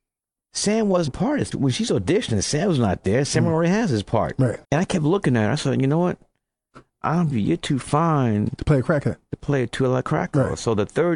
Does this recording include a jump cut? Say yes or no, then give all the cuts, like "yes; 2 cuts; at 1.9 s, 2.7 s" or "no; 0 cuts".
yes; 4 cuts; at 1.1 s, 1.5 s, 4.6 s, 7.3 s